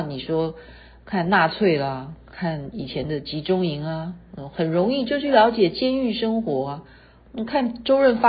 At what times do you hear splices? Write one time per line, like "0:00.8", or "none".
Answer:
none